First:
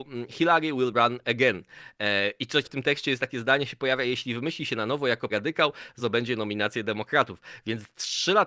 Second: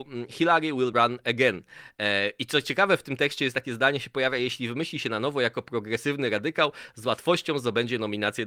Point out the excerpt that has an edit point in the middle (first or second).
first